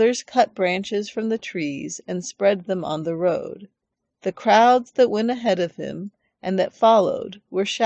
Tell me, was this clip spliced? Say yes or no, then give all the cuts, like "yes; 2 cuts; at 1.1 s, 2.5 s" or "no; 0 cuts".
no; 0 cuts